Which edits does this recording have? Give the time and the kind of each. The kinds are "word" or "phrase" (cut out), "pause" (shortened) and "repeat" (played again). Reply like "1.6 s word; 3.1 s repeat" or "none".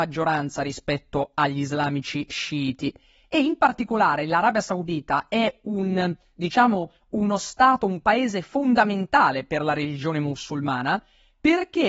none